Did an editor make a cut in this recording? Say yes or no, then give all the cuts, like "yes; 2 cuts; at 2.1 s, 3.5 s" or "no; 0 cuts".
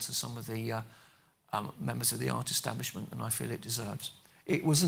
no; 0 cuts